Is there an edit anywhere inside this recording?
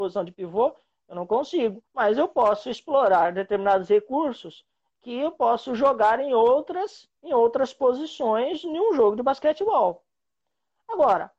yes; 2 cuts; at 1.9 s, 7.2 s

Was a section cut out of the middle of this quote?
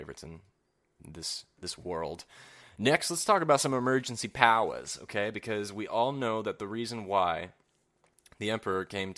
no; 0 cuts

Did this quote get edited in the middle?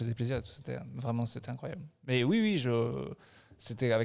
no; 0 cuts

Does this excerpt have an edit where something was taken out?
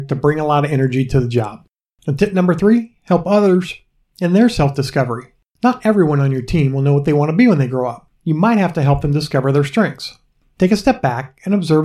no; 0 cuts

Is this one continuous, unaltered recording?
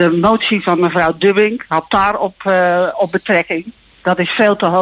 yes; 0 cuts

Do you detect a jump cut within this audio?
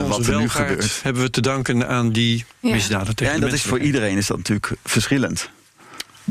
yes; 1 cut; at 2.5 s

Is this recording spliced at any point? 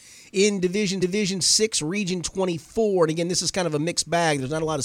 yes; 1 cut; at 1.0 s

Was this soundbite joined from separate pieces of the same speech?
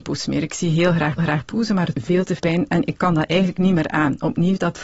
yes; 3 cuts; at 1.2 s, 1.9 s, 2.4 s

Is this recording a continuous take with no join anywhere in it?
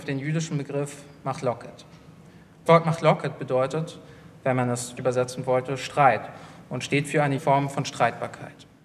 no; 3 cuts; at 2.7 s, 5.0 s, 7.4 s

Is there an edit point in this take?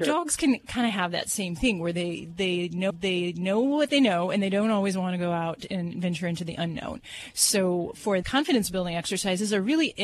yes; 2 cuts; at 2.9 s, 8.2 s

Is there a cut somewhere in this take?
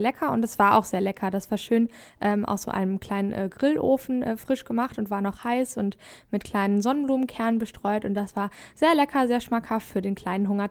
no; 0 cuts

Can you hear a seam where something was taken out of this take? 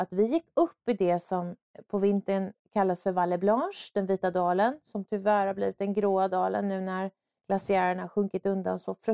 no; 0 cuts

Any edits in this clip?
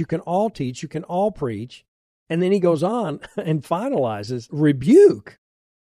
yes; 1 cut; at 4.5 s

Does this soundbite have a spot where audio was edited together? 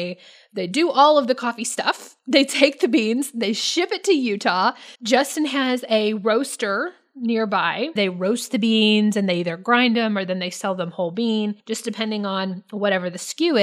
yes; 4 cuts; at 2.2 s, 4.9 s, 8.0 s, 11.6 s

